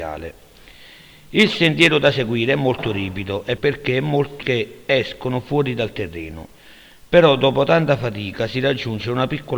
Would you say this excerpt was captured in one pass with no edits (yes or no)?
no